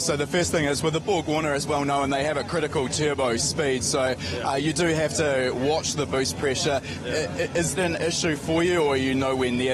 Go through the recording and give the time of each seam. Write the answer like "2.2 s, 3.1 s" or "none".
1.7 s, 7.8 s